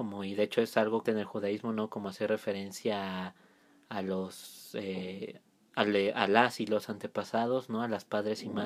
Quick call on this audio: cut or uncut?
cut